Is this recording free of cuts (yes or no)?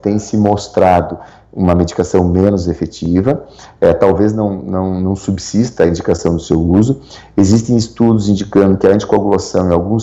yes